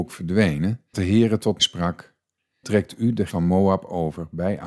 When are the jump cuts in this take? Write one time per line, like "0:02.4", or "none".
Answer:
0:00.9
0:01.6
0:02.6
0:03.3